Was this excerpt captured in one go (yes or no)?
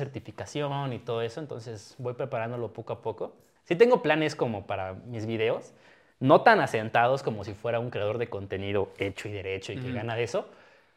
yes